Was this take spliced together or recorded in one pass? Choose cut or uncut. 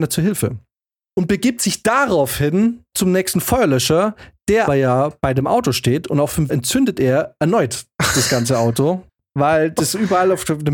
cut